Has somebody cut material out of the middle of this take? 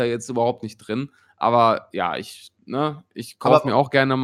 no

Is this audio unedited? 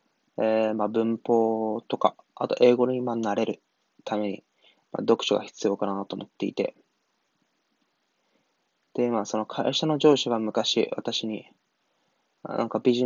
yes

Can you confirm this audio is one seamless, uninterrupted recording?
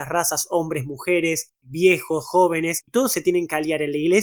no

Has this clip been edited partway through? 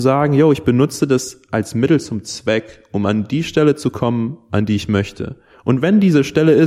no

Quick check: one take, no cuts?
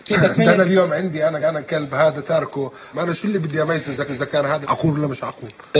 no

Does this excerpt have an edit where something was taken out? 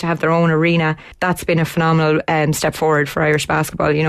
yes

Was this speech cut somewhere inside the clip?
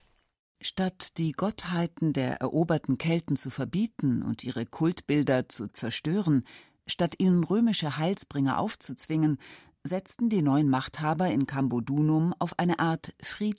no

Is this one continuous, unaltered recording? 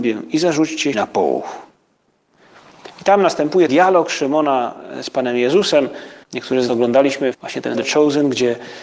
no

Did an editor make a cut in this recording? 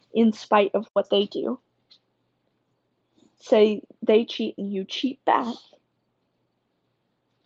no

